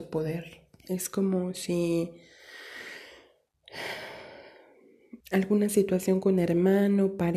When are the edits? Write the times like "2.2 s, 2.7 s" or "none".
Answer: 5.2 s